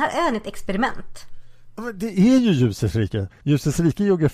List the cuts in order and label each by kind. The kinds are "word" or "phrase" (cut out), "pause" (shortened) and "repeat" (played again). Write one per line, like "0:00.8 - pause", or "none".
none